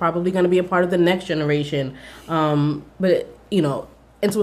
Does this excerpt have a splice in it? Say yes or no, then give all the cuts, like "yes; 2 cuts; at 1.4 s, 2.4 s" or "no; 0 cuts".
yes; 1 cut; at 2.9 s